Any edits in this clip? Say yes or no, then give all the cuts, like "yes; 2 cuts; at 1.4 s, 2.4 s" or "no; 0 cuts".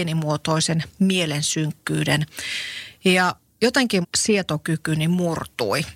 yes; 1 cut; at 4.0 s